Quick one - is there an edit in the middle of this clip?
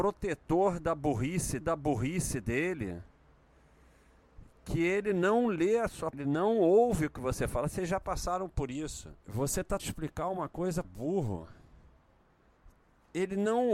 yes; 5 cuts; at 1.6 s, 6.1 s, 9.2 s, 9.8 s, 10.8 s

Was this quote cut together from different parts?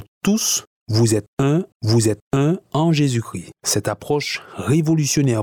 yes; 2 cuts; at 1.7 s, 3.6 s

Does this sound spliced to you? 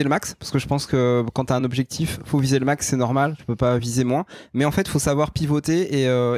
no; 0 cuts

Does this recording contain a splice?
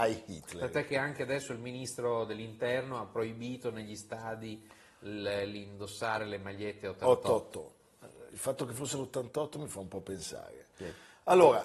no; 0 cuts

